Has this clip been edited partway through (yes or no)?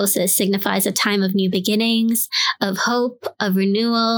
no